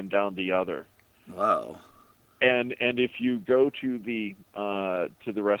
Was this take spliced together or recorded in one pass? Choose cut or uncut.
uncut